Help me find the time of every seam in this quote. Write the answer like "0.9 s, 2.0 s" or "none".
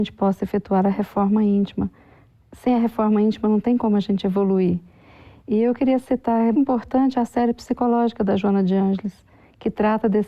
6.5 s